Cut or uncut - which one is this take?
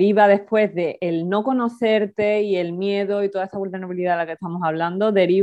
uncut